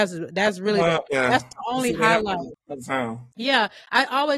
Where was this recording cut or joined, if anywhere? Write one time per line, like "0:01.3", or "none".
0:01.1
0:03.3